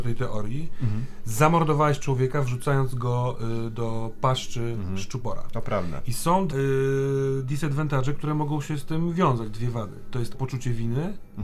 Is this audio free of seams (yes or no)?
no